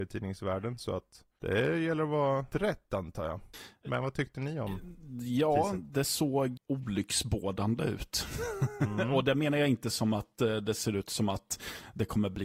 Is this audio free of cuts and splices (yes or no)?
no